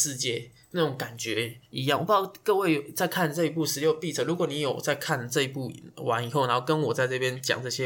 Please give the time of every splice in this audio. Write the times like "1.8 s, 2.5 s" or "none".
1.7 s